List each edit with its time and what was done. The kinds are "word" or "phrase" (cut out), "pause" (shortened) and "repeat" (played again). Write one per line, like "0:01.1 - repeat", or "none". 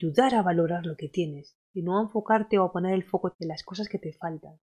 0:01.6 - pause
0:03.3 - word